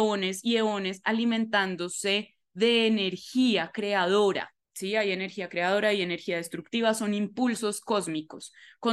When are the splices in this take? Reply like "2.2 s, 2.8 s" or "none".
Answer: 4.6 s